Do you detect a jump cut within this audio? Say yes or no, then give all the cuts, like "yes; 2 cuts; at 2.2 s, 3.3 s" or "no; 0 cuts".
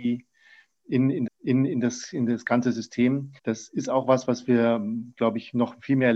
yes; 3 cuts; at 1.3 s, 3.4 s, 4.2 s